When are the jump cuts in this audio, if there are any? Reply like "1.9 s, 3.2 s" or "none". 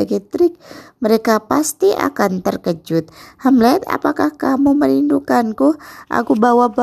none